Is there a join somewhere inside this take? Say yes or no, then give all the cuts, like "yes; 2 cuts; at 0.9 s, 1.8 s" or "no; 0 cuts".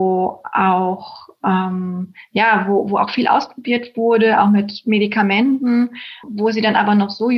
yes; 1 cut; at 6.2 s